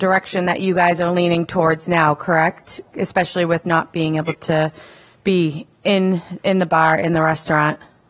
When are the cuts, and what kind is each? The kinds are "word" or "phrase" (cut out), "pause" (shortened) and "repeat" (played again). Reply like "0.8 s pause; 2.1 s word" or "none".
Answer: none